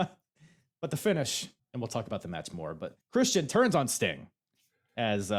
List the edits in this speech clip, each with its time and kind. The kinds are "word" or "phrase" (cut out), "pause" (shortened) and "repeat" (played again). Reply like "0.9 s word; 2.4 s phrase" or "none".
1.6 s pause; 3.0 s pause